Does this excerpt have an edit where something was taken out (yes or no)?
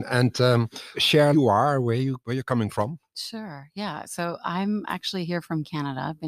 yes